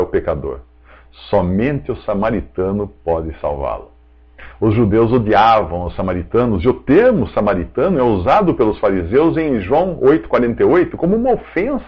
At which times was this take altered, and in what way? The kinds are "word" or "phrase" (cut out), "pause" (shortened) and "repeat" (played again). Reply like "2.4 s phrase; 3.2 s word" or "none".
none